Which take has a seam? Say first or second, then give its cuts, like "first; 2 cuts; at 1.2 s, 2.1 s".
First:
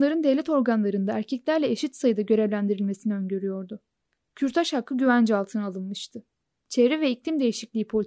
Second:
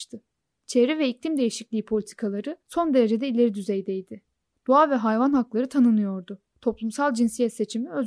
second; 2 cuts; at 2.6 s, 6.5 s